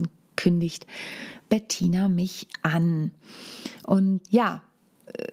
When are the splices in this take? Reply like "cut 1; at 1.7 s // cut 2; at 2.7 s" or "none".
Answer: cut 1; at 4.3 s